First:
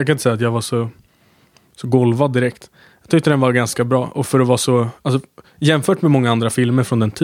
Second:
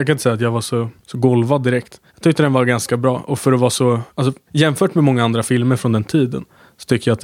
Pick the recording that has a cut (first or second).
second